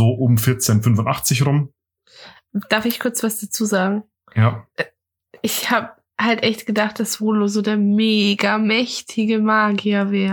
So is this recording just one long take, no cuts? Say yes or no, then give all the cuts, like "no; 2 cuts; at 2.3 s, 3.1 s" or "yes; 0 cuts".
yes; 0 cuts